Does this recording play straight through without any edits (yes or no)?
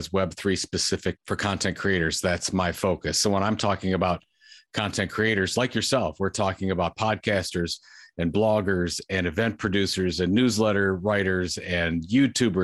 no